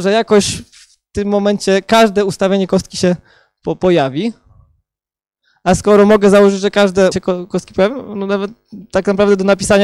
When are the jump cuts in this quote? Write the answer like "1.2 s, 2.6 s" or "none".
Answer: 7.1 s